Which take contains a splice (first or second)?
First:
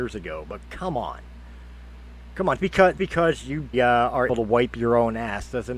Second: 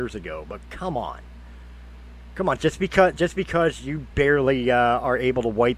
first